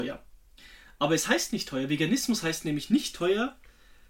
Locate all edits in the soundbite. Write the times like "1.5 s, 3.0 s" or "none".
none

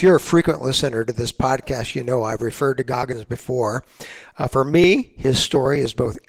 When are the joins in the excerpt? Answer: none

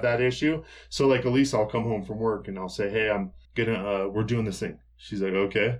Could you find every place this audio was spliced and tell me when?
3.4 s, 4.9 s

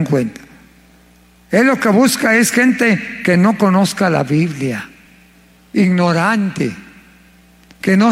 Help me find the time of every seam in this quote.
none

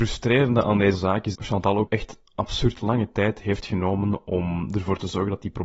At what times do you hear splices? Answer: 0.9 s, 1.3 s, 1.9 s

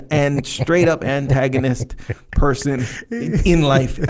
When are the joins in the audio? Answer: none

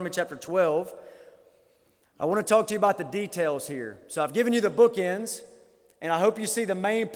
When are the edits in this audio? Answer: none

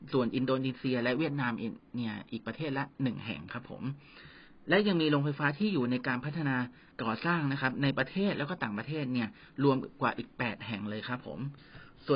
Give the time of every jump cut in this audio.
6.9 s

